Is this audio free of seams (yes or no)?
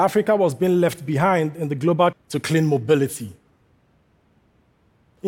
no